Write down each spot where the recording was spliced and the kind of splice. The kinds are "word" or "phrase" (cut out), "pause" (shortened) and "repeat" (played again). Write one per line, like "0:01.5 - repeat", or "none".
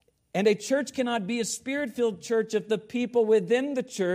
none